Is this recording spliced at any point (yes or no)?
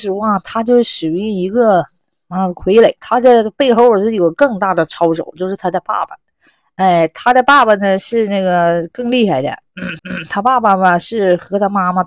yes